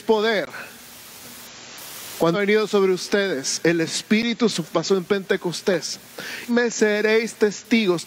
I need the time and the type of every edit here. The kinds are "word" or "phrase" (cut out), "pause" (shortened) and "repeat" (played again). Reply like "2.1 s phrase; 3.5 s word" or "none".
2.3 s word; 4.5 s word; 6.5 s word